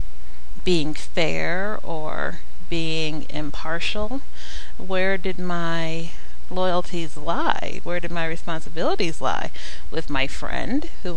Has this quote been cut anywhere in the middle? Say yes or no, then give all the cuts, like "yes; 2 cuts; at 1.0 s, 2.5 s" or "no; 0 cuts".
no; 0 cuts